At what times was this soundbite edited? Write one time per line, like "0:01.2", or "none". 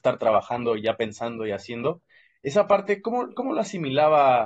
none